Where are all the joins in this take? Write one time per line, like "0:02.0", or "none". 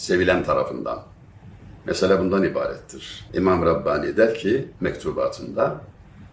0:04.7